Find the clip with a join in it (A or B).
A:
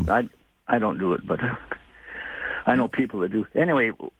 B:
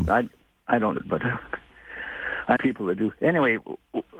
B